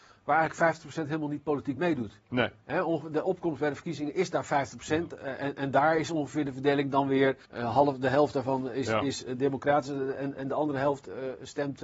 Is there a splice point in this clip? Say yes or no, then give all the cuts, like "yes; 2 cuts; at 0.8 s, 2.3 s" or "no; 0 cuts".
yes; 1 cut; at 7.4 s